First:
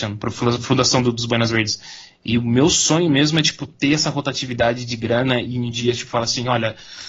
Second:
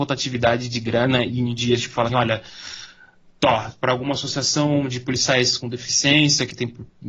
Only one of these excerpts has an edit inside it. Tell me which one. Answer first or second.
second